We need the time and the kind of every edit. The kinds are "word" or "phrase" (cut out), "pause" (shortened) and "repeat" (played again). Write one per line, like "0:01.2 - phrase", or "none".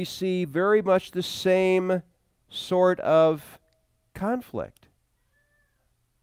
none